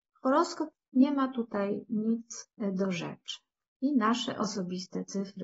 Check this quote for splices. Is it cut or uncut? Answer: cut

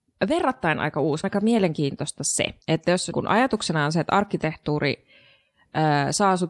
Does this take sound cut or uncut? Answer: cut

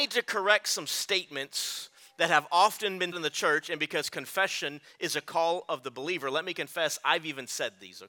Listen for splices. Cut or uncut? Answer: cut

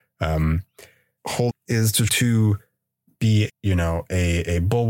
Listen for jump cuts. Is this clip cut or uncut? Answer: cut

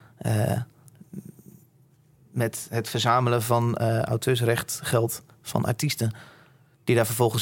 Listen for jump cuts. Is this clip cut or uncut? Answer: uncut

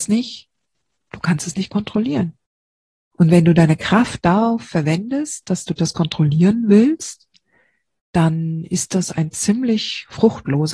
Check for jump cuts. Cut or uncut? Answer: uncut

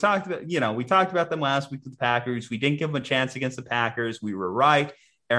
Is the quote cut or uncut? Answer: uncut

